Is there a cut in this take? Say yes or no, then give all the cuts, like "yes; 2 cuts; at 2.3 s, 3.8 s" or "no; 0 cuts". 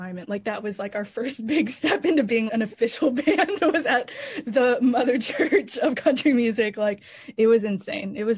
yes; 1 cut; at 2.5 s